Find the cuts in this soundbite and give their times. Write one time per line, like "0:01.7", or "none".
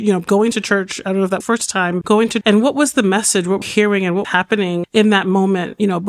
0:01.4
0:02.0
0:02.4
0:03.6
0:04.2
0:04.8